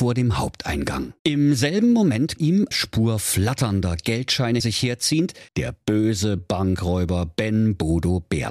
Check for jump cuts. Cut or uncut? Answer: cut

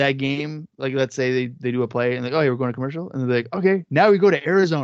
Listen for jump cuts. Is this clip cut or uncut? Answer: uncut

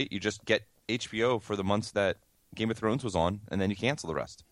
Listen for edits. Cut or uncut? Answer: uncut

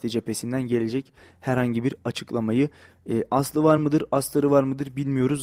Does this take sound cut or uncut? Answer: uncut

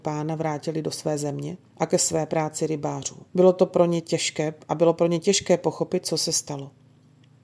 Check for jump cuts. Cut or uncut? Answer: cut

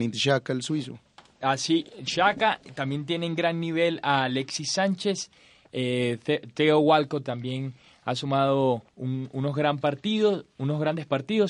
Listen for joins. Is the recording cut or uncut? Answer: cut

